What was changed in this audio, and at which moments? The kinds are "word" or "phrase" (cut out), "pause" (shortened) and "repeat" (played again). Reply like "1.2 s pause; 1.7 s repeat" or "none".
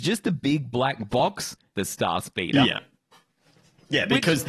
1.7 s phrase